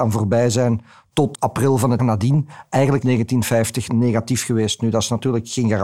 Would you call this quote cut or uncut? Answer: cut